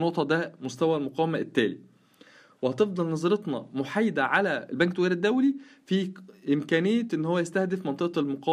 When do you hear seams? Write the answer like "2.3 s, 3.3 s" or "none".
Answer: none